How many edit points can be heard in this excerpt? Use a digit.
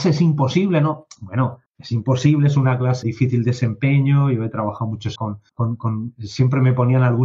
4